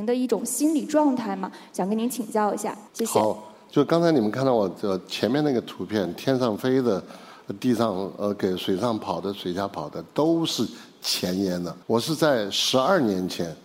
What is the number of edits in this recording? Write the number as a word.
two